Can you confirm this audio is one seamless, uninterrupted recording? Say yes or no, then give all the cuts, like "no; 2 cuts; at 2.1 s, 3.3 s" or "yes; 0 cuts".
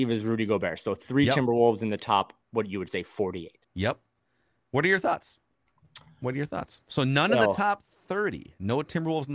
no; 2 cuts; at 2.4 s, 3.6 s